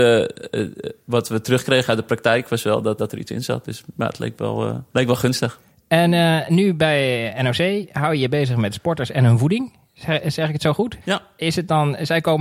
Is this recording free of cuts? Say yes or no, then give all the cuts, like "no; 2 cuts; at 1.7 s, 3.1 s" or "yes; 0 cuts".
no; 4 cuts; at 3.0 s, 4.9 s, 5.7 s, 11.0 s